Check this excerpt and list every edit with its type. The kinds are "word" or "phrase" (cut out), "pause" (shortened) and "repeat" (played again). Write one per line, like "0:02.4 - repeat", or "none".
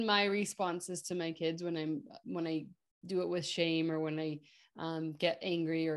0:02.2 - word